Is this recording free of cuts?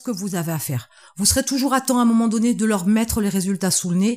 yes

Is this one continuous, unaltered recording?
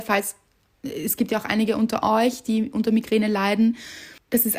yes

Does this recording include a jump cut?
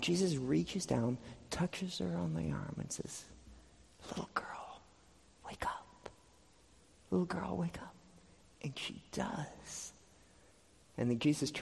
no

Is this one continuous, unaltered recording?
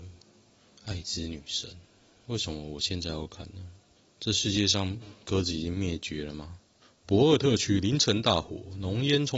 yes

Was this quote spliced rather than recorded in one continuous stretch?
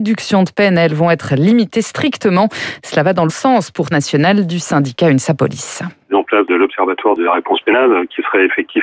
yes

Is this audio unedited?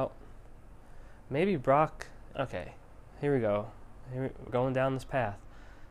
no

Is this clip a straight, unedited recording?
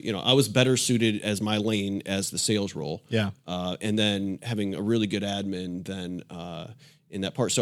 yes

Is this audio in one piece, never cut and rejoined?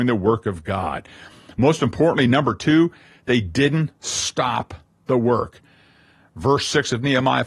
yes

